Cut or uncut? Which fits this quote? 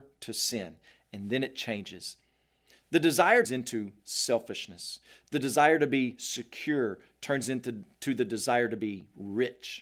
cut